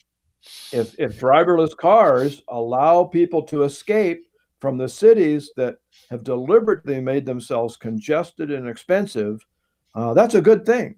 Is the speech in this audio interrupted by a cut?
no; 0 cuts

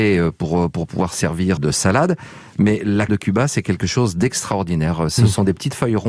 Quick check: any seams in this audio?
yes; 2 cuts; at 1.6 s, 3.1 s

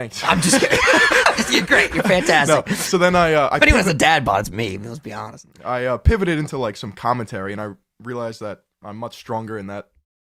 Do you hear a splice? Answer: no; 0 cuts

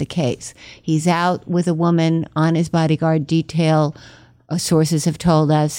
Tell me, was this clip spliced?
no; 0 cuts

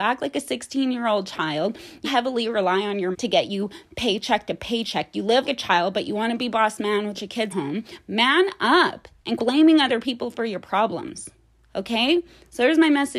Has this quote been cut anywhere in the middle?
yes; 7 cuts; at 2.0 s, 3.1 s, 5.4 s, 6.5 s, 7.1 s, 7.5 s, 9.4 s

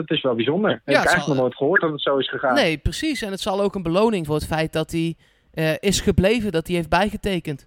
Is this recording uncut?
no; 1 cut; at 4.2 s

